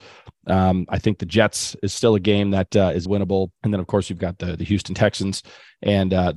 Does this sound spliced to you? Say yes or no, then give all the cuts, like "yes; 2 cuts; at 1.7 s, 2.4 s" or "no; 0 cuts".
yes; 2 cuts; at 3.1 s, 3.6 s